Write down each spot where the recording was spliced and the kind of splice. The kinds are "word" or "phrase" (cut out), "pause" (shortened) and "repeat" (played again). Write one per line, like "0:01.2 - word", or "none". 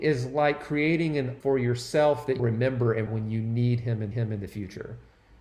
0:01.4 - word
0:02.4 - word
0:03.1 - phrase
0:04.1 - repeat